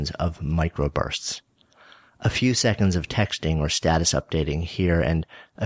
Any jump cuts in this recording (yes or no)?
no